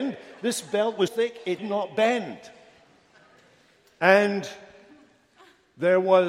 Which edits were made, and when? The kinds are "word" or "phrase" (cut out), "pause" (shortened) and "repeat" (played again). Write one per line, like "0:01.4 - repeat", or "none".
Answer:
0:01.1 - word
0:01.6 - word

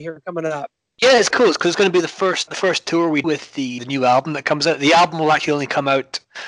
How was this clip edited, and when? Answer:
0:01.3 - word
0:02.5 - word
0:03.2 - word
0:03.8 - word

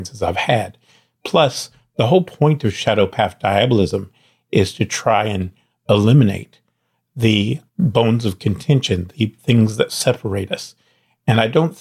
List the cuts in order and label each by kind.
0:07.7 - pause

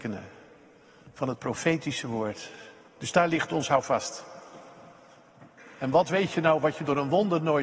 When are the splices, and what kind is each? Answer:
none

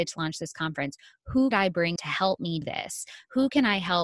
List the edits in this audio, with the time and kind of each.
0:01.5 - word
0:02.0 - word
0:02.6 - word

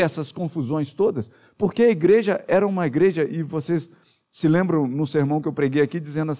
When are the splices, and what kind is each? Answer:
none

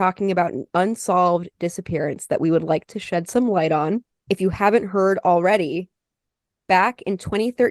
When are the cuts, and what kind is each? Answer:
none

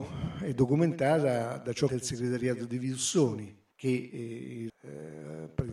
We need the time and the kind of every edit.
0:01.9 - phrase
0:03.7 - pause
0:04.7 - word

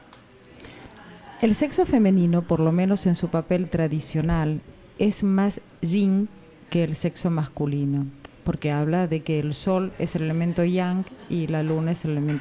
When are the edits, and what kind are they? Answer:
none

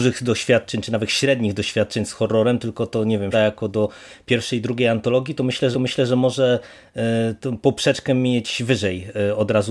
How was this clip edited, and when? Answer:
0:03.3 - word
0:05.7 - repeat

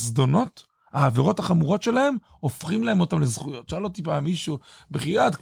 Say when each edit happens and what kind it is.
none

